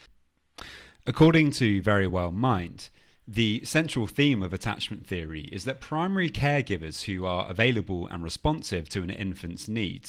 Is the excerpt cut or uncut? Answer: uncut